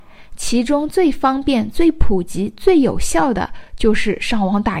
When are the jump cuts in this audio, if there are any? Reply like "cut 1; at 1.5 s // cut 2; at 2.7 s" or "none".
none